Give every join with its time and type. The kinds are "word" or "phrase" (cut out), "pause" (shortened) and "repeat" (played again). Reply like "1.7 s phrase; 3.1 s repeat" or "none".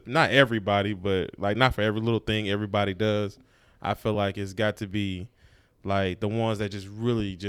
none